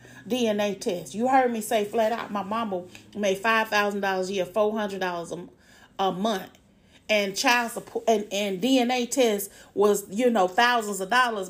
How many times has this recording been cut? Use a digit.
1